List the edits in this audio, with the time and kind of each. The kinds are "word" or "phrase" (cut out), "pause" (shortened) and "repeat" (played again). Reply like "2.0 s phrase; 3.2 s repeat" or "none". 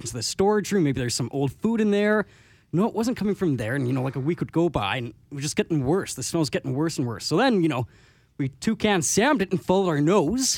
none